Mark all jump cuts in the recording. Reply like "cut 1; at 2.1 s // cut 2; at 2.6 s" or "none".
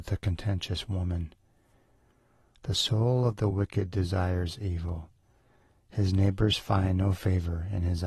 none